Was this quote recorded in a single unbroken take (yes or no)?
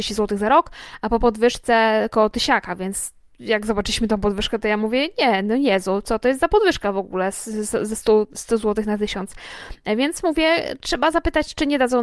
yes